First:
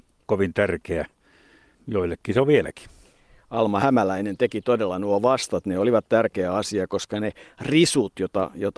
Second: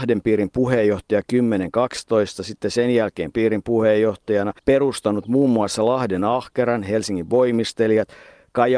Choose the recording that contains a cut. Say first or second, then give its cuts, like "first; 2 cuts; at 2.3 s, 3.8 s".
second; 2 cuts; at 3.3 s, 4.6 s